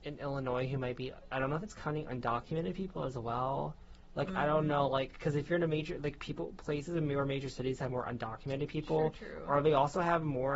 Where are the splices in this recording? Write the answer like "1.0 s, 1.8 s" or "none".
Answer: none